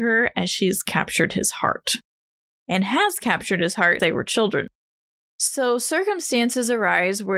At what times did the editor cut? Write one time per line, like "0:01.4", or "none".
0:04.0